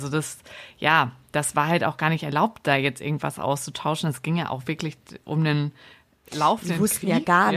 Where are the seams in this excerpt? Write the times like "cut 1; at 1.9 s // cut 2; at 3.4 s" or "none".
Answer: none